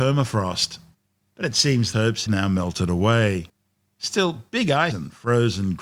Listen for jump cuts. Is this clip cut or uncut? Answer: cut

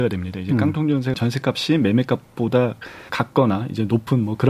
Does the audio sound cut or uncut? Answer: cut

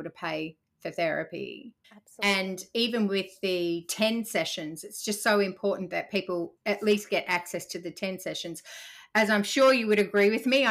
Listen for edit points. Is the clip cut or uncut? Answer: cut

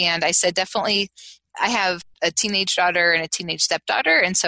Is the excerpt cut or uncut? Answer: uncut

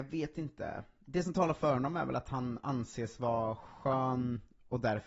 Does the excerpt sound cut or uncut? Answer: uncut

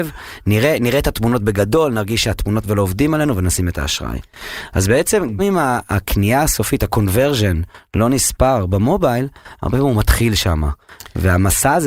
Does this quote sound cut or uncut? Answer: cut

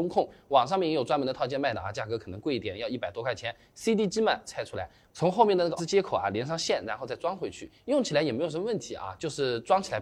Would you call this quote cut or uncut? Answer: cut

